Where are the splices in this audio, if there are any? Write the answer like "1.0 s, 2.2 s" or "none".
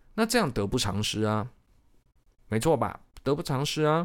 none